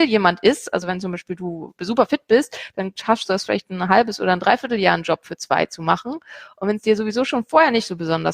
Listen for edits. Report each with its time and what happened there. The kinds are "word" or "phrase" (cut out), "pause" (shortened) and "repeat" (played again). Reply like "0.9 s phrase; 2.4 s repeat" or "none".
none